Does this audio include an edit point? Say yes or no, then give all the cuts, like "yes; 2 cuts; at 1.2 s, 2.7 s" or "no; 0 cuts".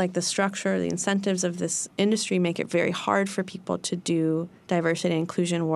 no; 0 cuts